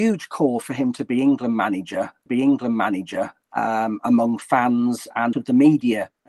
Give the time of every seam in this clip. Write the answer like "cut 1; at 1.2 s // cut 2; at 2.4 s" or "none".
cut 1; at 2.3 s // cut 2; at 5.3 s

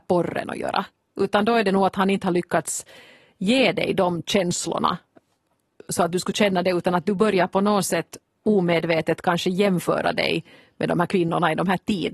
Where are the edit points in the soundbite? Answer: none

